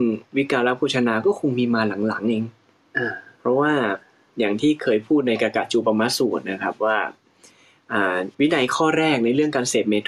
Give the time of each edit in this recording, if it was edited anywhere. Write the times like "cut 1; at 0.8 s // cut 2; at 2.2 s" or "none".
cut 1; at 8.3 s